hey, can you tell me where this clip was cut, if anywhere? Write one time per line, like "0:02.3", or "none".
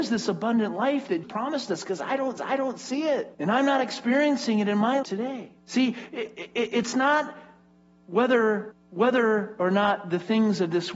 0:01.2
0:02.4
0:03.3
0:05.0
0:05.6
0:08.7